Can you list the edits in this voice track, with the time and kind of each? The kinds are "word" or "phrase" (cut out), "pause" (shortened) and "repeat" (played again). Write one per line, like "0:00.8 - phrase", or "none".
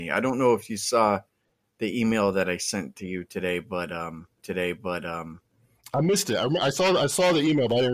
0:04.4 - repeat